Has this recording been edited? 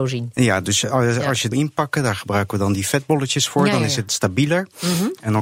yes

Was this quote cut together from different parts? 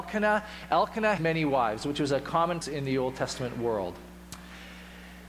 yes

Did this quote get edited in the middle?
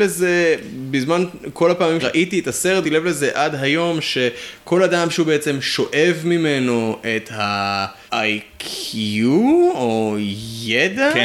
yes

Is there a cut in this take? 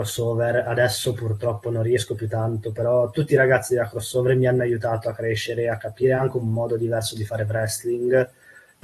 no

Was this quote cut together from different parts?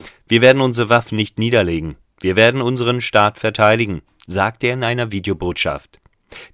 no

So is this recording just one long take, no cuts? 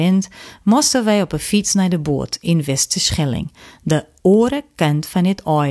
yes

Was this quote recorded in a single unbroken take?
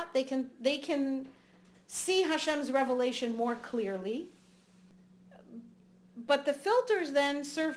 yes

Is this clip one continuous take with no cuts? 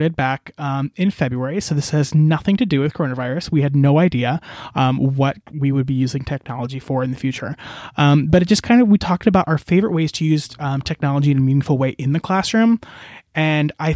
no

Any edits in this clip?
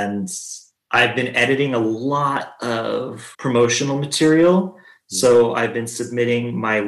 yes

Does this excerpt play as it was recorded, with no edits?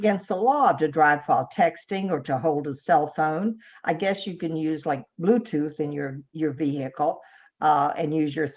yes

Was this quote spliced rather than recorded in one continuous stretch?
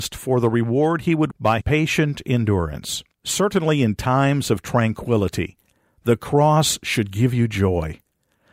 yes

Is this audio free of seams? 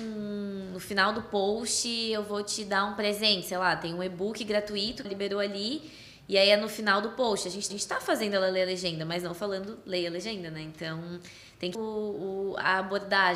no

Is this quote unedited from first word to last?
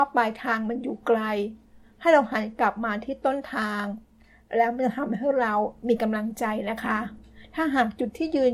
yes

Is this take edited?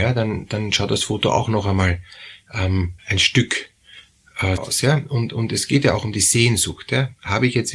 yes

